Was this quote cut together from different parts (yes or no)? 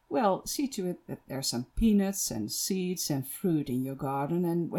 no